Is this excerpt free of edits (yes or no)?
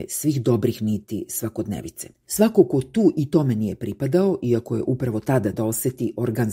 no